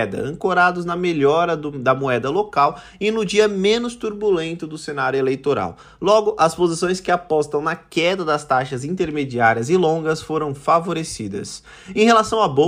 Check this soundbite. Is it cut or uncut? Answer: uncut